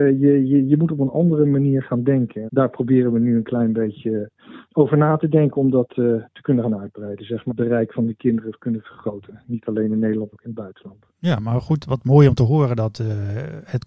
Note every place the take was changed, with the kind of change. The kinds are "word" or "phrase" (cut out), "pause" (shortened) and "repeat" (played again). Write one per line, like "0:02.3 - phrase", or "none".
0:02.5 - word
0:07.5 - phrase
0:10.3 - word
0:11.1 - pause
0:11.8 - word

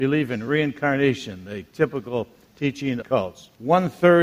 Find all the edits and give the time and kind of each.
0:03.0 - phrase

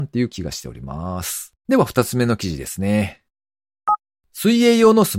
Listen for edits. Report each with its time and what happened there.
0:01.6 - pause
0:04.1 - pause

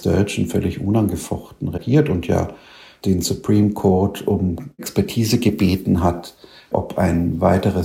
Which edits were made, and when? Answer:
none

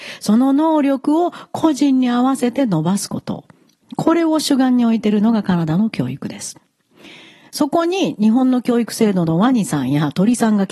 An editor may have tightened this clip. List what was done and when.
none

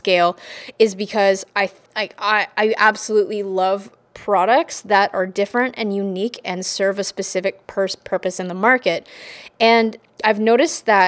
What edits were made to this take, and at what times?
0:01.9 - pause

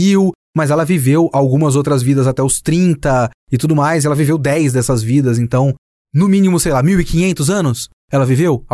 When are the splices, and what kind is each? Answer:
none

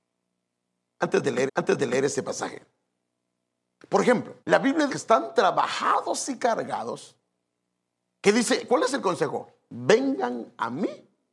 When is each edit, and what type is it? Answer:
0:01.5 - repeat
0:04.4 - pause
0:04.9 - phrase

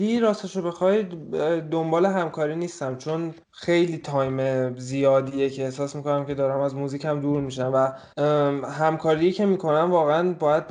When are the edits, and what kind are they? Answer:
0:03.4 - pause
0:08.1 - pause

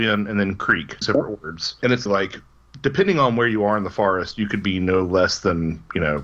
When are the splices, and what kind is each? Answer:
0:01.0 - word
0:02.1 - word

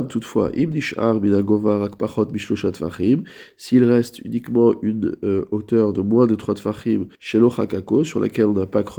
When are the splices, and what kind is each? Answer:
0:07.1 - pause

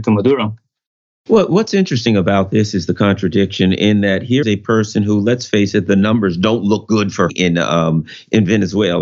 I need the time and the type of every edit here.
0:04.4 - word
0:07.3 - phrase

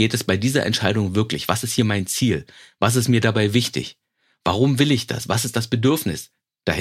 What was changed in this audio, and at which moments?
none

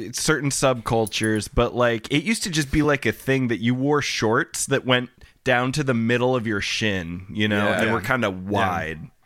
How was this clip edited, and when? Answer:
none

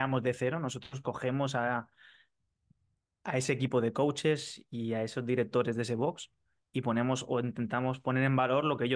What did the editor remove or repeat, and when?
none

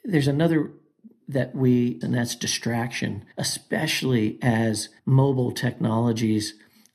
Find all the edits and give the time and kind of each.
0:01.2 - word
0:02.0 - phrase
0:03.3 - pause
0:05.0 - pause

